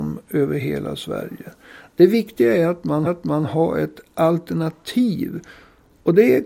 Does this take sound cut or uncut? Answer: cut